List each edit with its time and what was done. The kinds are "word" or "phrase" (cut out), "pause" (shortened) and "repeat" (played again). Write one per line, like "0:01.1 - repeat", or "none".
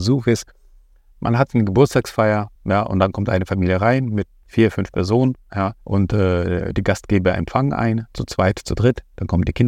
0:02.6 - pause
0:05.8 - pause